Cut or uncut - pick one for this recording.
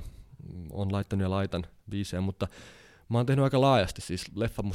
uncut